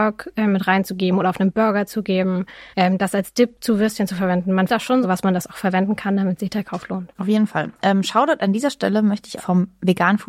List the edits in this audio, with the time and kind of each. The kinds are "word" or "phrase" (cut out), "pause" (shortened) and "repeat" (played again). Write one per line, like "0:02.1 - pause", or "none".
0:02.7 - pause
0:04.7 - word
0:05.0 - phrase
0:07.1 - pause
0:09.4 - phrase